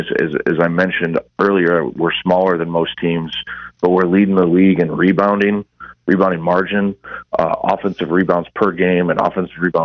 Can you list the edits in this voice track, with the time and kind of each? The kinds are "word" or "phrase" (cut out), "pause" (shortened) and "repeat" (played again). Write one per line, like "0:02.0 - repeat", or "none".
none